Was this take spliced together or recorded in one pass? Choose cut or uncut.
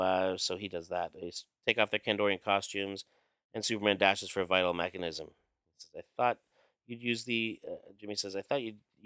uncut